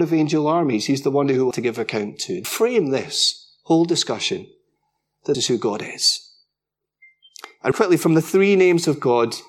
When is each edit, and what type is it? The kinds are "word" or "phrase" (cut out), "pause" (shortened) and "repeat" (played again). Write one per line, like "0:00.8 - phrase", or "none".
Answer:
0:01.5 - word
0:02.4 - word
0:05.3 - word
0:07.7 - word